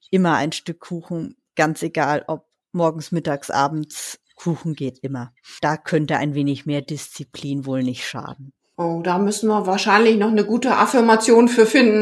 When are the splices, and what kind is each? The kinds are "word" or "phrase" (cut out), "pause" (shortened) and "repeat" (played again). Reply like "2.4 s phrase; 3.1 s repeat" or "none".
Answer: none